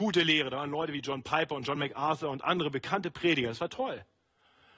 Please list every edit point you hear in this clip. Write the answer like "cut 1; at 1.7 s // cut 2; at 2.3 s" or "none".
none